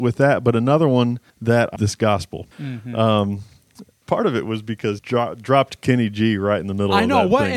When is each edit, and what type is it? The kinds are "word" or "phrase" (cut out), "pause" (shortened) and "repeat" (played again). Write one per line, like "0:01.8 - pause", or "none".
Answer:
0:01.3 - pause
0:01.8 - phrase
0:02.5 - pause
0:04.0 - word
0:05.0 - word